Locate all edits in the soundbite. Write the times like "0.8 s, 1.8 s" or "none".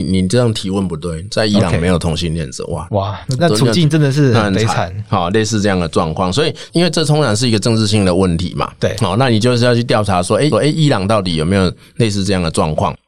3.4 s, 10.5 s